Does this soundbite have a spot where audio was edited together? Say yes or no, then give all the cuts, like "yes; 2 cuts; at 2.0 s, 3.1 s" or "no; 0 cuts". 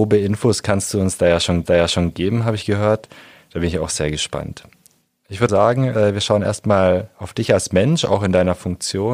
yes; 2 cuts; at 1.7 s, 5.5 s